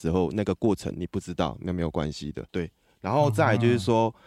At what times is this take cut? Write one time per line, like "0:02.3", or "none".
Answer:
0:02.5